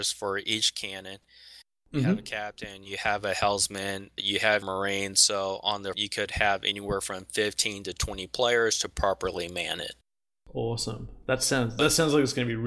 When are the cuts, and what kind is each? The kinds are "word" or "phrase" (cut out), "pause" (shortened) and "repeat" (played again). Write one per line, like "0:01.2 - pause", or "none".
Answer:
0:04.2 - word
0:04.6 - word
0:05.9 - word

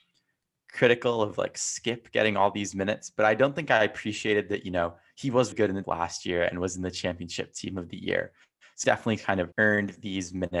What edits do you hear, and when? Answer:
0:05.5 - word
0:05.8 - word
0:08.8 - word
0:09.5 - pause

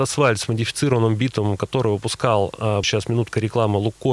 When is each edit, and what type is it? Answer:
0:02.8 - word

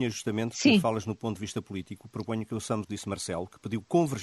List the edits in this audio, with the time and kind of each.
0:02.8 - phrase

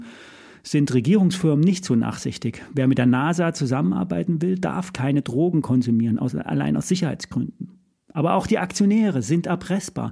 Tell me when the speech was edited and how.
none

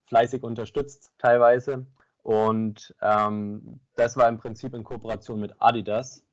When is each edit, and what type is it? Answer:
0:01.1 - pause

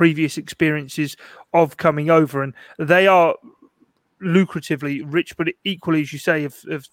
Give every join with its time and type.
none

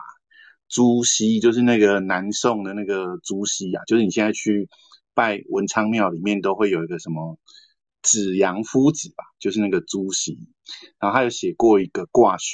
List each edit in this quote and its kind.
none

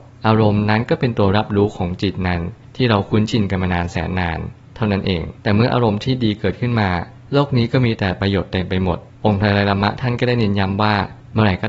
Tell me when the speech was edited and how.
0:05.4 - pause

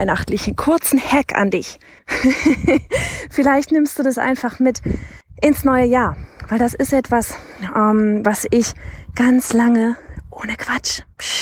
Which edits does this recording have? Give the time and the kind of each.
0:02.0 - pause
0:05.2 - pause

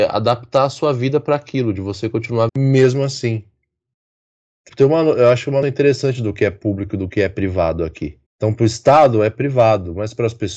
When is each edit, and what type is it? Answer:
0:02.5 - word
0:04.7 - word
0:05.6 - word
0:08.3 - pause

